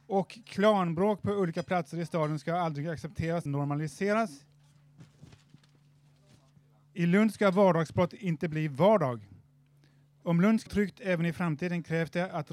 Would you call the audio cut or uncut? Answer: cut